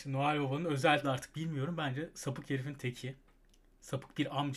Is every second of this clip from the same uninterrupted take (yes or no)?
no